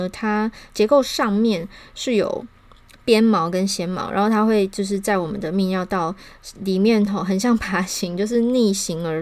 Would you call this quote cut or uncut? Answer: uncut